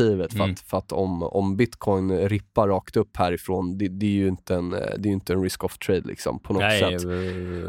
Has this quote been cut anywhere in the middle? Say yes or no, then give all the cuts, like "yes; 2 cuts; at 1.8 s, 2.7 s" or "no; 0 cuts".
no; 0 cuts